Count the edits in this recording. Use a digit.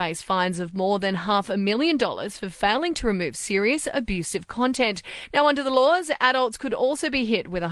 0